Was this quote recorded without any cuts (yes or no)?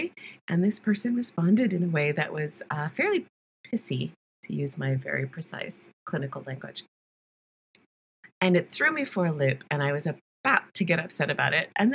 yes